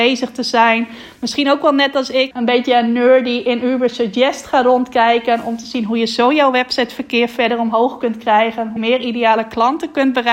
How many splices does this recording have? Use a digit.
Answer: 2